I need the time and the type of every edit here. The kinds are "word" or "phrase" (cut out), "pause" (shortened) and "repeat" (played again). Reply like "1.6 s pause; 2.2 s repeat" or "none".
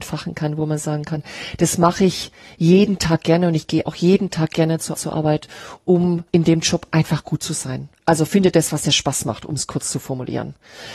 4.9 s repeat; 6.3 s pause